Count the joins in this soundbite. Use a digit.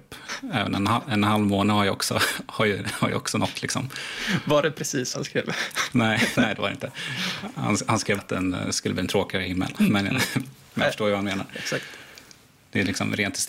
2